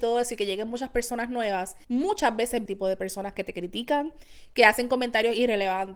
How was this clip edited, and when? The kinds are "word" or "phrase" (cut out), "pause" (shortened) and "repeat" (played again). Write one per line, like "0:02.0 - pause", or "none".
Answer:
0:01.8 - pause
0:02.7 - phrase